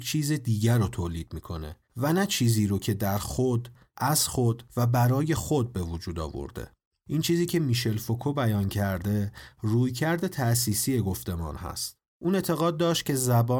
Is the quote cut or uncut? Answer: uncut